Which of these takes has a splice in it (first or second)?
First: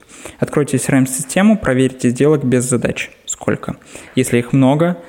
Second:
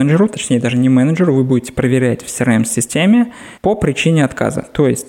second